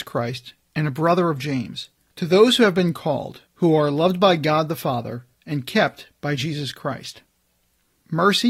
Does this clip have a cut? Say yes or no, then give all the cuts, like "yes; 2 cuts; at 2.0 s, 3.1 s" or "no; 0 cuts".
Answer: yes; 3 cuts; at 2.0 s, 3.5 s, 5.3 s